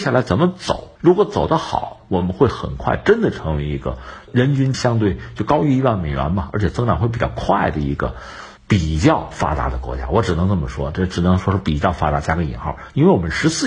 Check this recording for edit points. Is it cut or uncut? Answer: cut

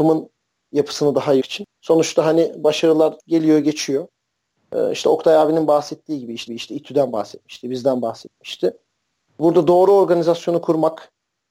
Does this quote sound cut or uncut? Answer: cut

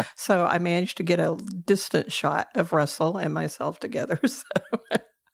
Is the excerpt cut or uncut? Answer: uncut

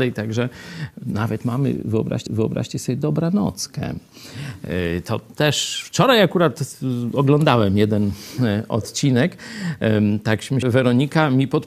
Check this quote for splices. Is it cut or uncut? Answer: cut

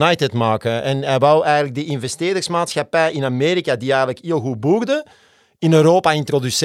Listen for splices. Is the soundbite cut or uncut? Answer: uncut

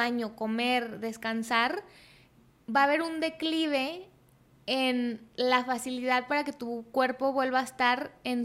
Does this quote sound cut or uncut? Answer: uncut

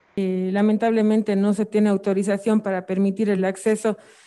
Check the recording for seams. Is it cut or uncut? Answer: uncut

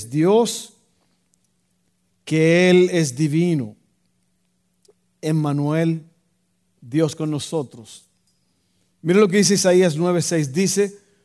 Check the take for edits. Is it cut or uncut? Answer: uncut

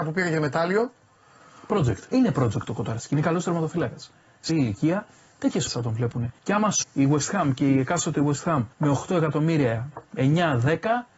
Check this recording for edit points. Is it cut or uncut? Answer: cut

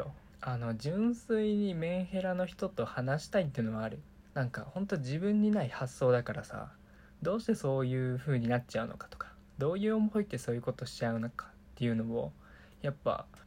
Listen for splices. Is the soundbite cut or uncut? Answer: uncut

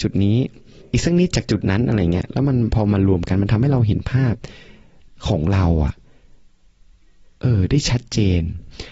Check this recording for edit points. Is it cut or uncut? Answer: uncut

